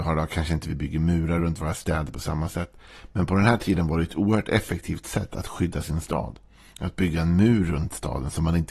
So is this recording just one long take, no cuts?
yes; 0 cuts

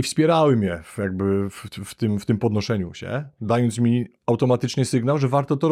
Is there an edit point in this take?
no; 0 cuts

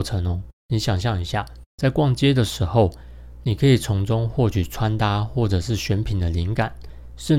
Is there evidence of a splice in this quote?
yes; 1 cut; at 1.7 s

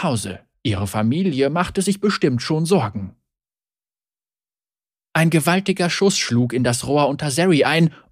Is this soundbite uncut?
yes; 0 cuts

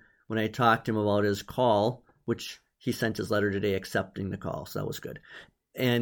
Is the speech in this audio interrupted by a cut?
no; 0 cuts

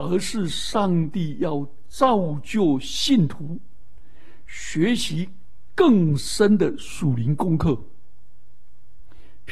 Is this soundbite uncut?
yes; 0 cuts

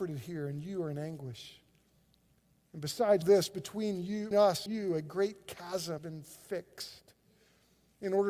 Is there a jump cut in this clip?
yes; 4 cuts; at 3.2 s, 4.3 s, 4.7 s, 6.0 s

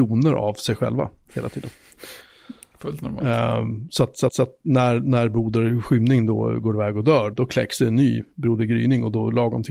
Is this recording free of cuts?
no; 2 cuts; at 4.3 s, 7.3 s

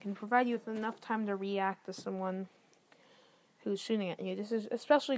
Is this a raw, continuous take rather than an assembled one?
yes; 0 cuts

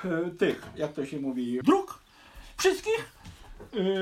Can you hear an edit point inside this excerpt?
yes; 1 cut; at 1.6 s

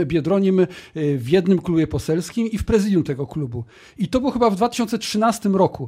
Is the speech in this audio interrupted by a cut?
no; 0 cuts

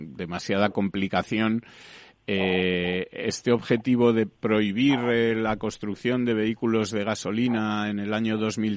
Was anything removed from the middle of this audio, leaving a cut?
no; 0 cuts

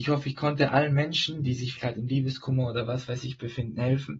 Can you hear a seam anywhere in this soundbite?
yes; 1 cut; at 1.8 s

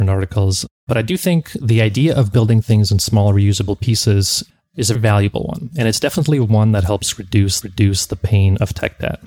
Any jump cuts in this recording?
yes; 3 cuts; at 4.5 s, 4.9 s, 7.6 s

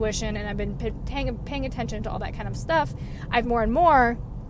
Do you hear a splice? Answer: yes; 1 cut; at 3.4 s

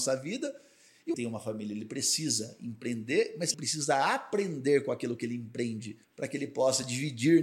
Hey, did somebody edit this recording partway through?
yes; 3 cuts; at 1.1 s, 3.5 s, 6.0 s

